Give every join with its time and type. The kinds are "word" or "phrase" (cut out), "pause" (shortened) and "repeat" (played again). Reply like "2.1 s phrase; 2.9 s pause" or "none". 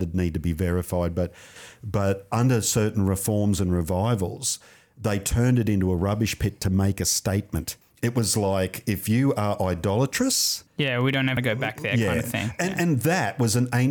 7.8 s pause; 10.7 s pause; 11.4 s word